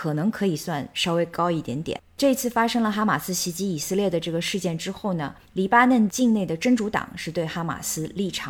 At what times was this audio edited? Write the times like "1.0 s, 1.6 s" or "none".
5.4 s